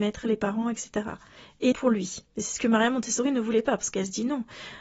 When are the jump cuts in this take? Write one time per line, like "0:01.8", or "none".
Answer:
0:01.7
0:02.3